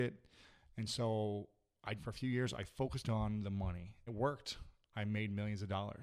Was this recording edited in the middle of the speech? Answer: yes; 2 cuts; at 2.0 s, 4.1 s

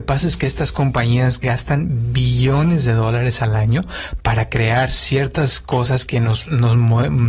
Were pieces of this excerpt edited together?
no; 0 cuts

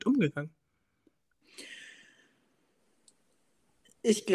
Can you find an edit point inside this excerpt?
no; 0 cuts

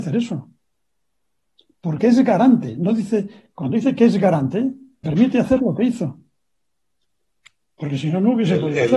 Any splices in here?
yes; 2 cuts; at 2.0 s, 5.0 s

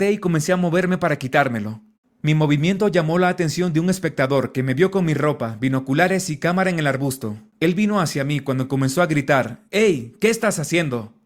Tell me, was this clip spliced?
yes; 2 cuts; at 1.9 s, 7.5 s

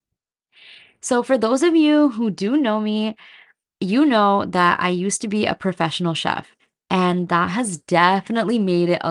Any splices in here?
no; 0 cuts

